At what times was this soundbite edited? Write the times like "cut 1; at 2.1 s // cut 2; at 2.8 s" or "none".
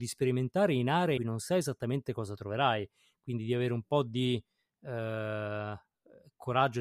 cut 1; at 1.2 s